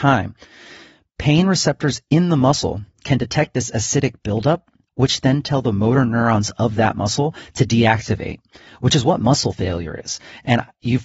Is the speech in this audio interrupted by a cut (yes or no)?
no